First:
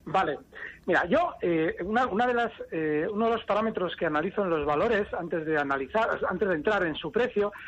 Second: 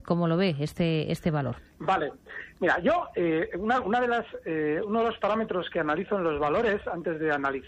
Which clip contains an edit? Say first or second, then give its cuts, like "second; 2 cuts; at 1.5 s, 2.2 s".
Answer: second; 1 cut; at 1.7 s